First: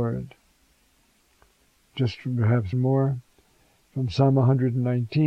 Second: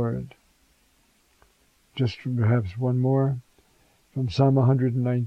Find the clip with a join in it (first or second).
first